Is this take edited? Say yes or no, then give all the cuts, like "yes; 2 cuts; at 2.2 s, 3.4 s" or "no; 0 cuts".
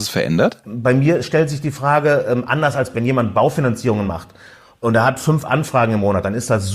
no; 0 cuts